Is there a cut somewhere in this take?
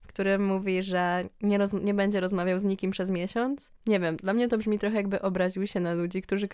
yes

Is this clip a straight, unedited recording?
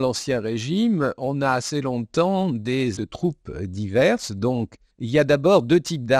no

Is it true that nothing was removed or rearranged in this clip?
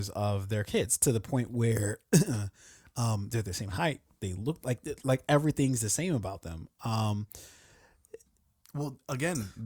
yes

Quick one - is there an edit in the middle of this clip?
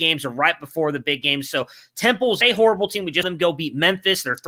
yes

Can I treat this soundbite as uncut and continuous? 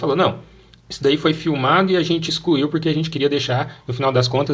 yes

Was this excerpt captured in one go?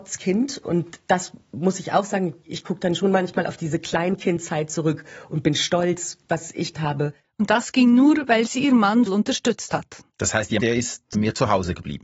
no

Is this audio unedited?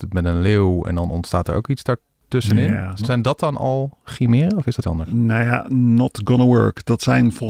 no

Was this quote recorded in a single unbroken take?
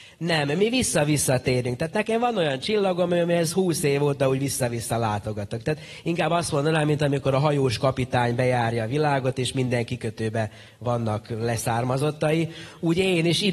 yes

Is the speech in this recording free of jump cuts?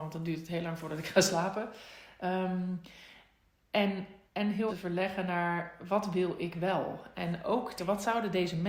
no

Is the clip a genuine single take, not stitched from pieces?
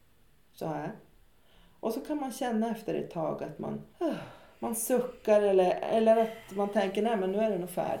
no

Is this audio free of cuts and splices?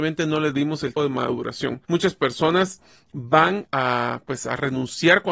no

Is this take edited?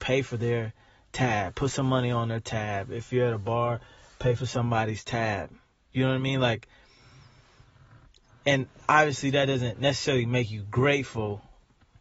no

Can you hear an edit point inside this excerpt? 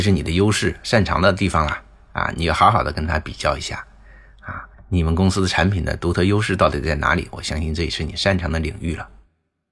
yes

